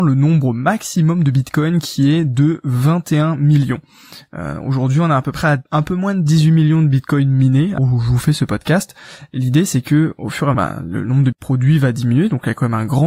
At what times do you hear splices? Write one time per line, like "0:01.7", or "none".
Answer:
0:05.7
0:07.8
0:10.5
0:11.3